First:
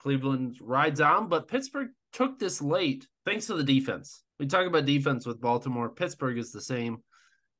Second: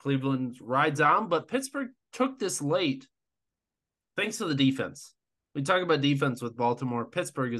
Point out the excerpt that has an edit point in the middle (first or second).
first